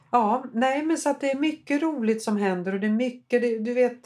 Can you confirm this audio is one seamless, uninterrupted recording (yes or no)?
yes